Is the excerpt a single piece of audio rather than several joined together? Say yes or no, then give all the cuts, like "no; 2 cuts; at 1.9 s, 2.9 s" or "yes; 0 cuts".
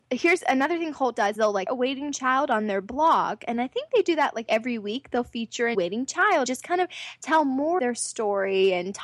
no; 6 cuts; at 1.4 s, 1.7 s, 4.5 s, 5.7 s, 6.5 s, 7.8 s